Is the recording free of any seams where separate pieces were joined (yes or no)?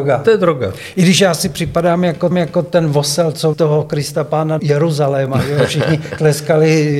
no